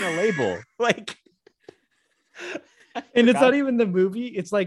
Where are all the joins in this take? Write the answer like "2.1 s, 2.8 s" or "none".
none